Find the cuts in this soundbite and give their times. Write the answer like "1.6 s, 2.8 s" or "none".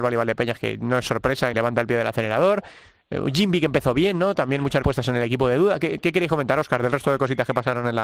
1.5 s, 4.8 s